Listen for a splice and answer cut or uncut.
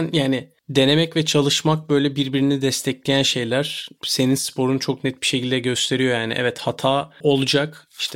uncut